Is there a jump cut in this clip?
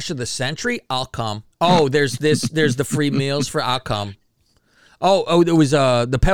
yes; 1 cut; at 1.5 s

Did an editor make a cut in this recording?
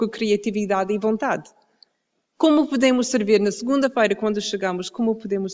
no; 0 cuts

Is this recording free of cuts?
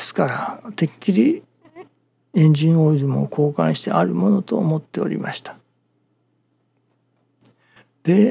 yes; 0 cuts

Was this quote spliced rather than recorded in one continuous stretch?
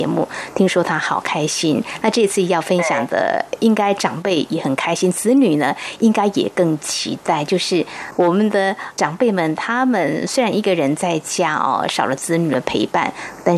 no; 0 cuts

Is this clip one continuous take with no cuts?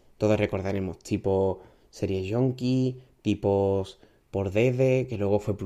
yes; 0 cuts

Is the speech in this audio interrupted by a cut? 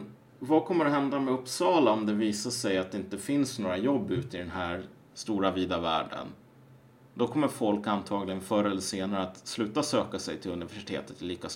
no; 0 cuts

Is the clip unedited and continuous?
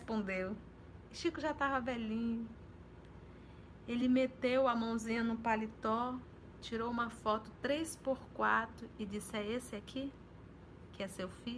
yes; 0 cuts

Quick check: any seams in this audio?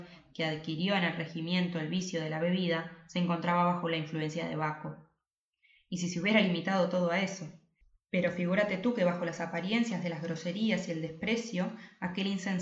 no; 0 cuts

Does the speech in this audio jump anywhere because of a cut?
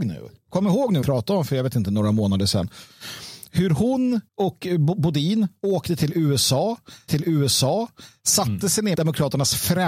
yes; 4 cuts; at 1.0 s, 4.3 s, 7.1 s, 8.9 s

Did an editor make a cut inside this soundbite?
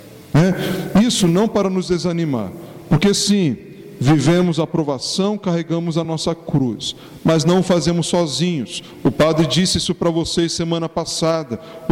no; 0 cuts

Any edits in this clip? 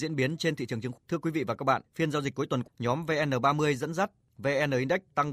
yes; 3 cuts; at 0.9 s, 1.8 s, 2.6 s

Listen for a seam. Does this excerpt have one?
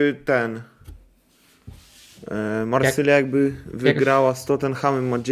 no; 0 cuts

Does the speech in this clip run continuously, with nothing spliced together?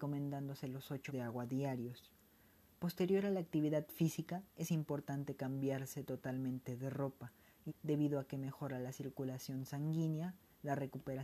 no; 2 cuts; at 1.1 s, 7.7 s

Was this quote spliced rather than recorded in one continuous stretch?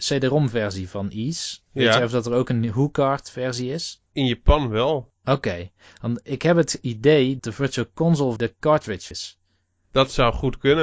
yes; 6 cuts; at 1.6 s, 4.1 s, 5.2 s, 7.4 s, 8.4 s, 9.1 s

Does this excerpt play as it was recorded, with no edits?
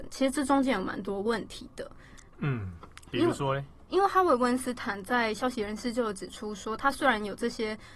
no; 1 cut; at 2.3 s

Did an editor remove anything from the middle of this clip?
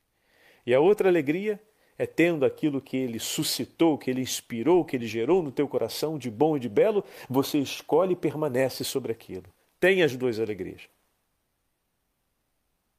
no; 0 cuts

